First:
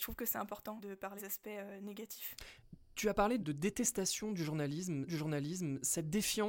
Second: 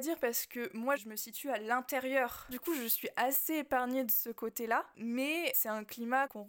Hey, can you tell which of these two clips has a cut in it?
first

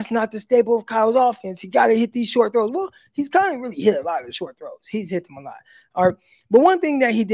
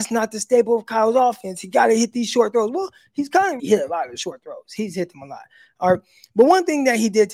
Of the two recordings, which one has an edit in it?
second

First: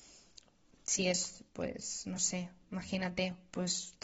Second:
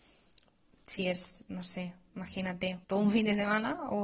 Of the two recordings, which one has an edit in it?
second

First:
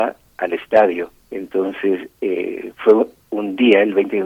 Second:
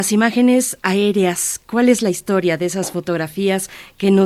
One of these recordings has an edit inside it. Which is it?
first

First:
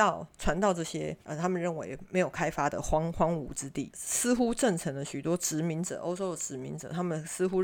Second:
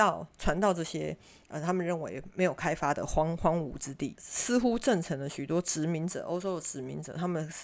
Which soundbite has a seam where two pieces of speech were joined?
first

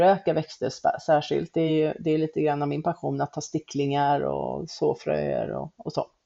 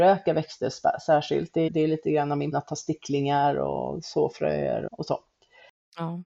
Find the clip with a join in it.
second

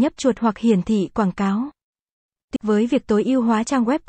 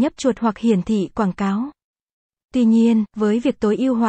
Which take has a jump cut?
first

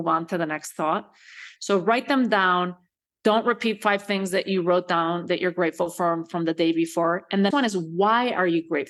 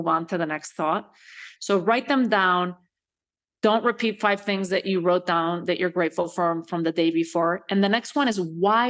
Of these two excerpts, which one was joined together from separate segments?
first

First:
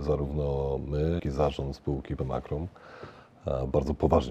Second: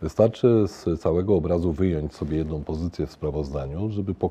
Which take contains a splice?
first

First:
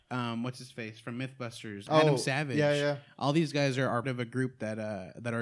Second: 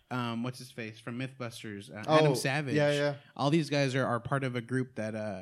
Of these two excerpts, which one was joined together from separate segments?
first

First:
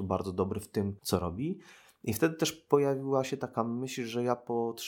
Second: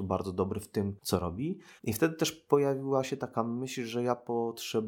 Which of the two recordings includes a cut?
second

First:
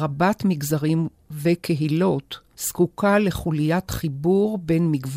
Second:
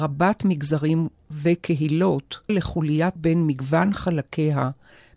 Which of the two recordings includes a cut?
second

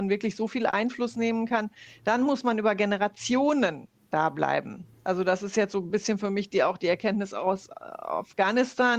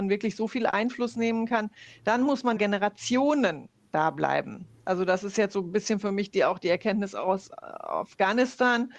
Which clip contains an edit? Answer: second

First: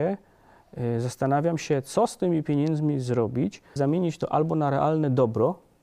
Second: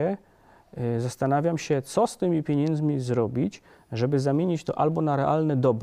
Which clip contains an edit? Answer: first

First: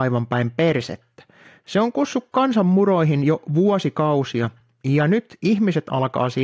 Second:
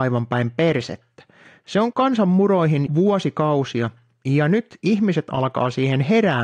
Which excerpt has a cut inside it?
second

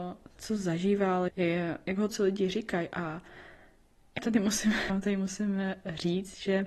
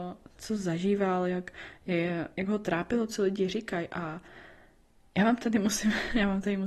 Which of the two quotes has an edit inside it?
first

